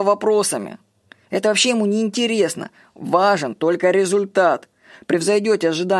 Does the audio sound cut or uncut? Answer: uncut